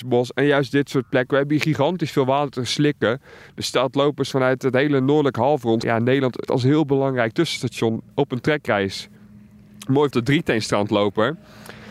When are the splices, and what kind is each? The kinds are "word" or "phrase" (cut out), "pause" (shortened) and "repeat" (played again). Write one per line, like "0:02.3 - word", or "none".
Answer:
0:05.8 - word
0:06.5 - word
0:10.1 - phrase